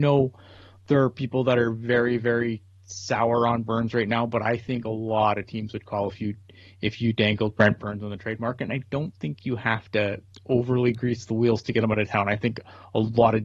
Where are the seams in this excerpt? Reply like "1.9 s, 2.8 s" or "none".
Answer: none